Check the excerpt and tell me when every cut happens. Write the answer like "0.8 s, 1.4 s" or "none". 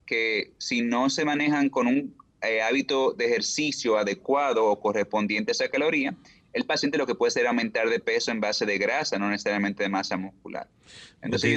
none